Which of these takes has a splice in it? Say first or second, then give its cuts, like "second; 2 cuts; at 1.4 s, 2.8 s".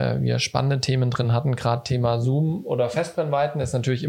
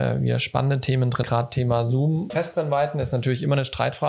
second; 2 cuts; at 1.2 s, 2.3 s